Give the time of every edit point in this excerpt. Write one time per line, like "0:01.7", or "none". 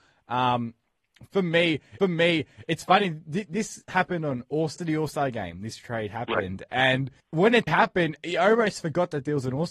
0:02.0
0:04.8
0:07.2
0:07.7